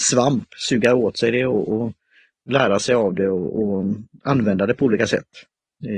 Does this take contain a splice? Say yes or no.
no